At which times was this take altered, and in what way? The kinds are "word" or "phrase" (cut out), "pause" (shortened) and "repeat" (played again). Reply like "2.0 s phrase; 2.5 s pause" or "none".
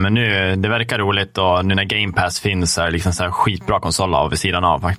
none